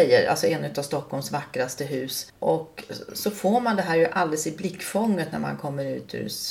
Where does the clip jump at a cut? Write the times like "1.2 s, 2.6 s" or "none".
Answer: 2.3 s